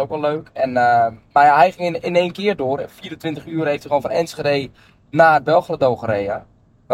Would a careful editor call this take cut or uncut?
uncut